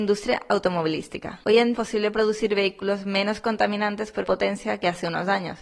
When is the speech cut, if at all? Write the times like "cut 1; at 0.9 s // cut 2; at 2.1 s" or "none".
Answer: cut 1; at 1.7 s // cut 2; at 4.2 s